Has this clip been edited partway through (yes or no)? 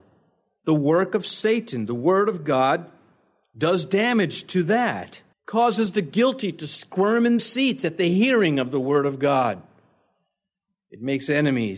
yes